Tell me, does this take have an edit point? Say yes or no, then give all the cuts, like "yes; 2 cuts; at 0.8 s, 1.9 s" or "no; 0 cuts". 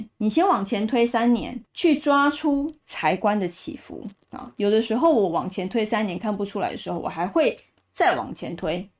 no; 0 cuts